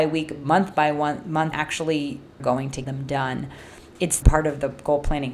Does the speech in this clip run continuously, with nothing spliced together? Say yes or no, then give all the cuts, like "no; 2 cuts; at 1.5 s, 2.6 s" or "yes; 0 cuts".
no; 4 cuts; at 1.5 s, 2.4 s, 2.8 s, 4.2 s